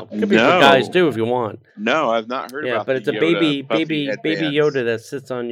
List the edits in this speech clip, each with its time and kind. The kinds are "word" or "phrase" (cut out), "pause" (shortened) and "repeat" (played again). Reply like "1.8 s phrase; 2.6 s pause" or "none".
1.7 s pause